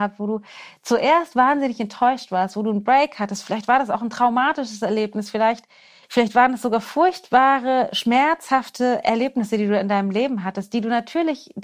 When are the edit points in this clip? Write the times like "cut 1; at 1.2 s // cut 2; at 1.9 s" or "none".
none